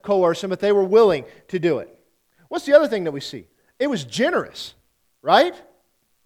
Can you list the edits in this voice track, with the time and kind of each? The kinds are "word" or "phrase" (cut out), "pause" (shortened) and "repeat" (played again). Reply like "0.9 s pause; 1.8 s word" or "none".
none